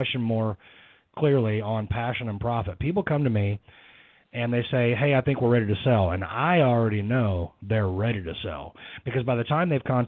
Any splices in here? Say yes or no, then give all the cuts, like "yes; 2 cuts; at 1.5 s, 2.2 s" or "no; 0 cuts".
no; 0 cuts